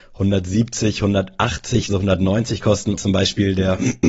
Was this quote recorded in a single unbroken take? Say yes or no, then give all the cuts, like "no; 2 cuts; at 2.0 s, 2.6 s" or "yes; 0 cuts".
no; 2 cuts; at 1.9 s, 3.0 s